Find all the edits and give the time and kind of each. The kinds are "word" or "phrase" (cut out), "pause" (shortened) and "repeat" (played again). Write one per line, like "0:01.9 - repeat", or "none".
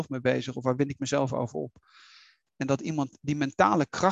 none